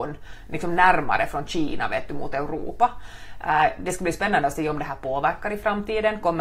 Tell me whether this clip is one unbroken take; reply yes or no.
yes